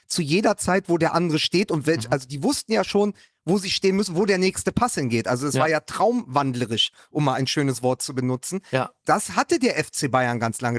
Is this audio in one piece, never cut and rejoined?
yes; 0 cuts

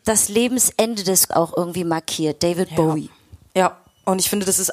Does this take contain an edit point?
yes; 1 cut; at 1.3 s

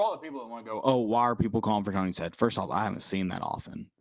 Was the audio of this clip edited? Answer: no; 0 cuts

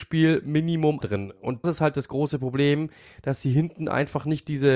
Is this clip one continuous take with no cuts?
no; 2 cuts; at 1.0 s, 1.6 s

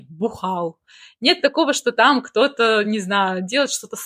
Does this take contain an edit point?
no; 0 cuts

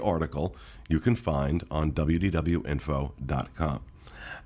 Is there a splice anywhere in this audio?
no; 0 cuts

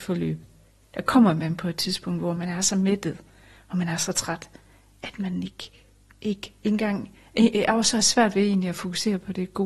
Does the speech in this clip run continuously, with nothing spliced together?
yes; 0 cuts

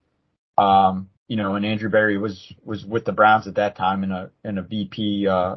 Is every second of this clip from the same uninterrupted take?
no; 1 cut; at 1.2 s

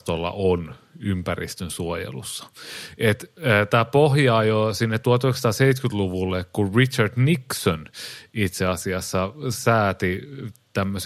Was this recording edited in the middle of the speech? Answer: no; 0 cuts

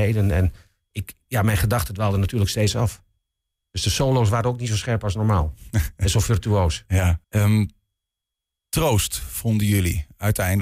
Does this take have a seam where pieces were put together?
yes; 1 cut; at 7.2 s

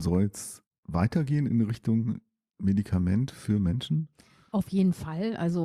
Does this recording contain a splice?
no; 0 cuts

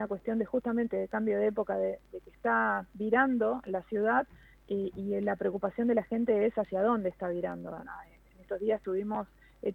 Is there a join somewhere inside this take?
no; 0 cuts

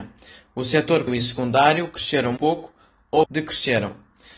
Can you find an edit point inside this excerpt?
yes; 3 cuts; at 1.1 s, 2.4 s, 3.2 s

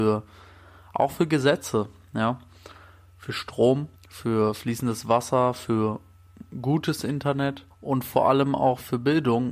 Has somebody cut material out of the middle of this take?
yes; 2 cuts; at 4.0 s, 7.7 s

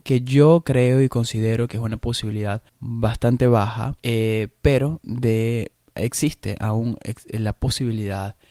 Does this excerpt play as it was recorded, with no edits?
no; 2 cuts; at 2.7 s, 4.0 s

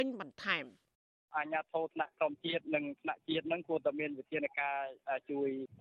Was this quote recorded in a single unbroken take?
yes; 0 cuts

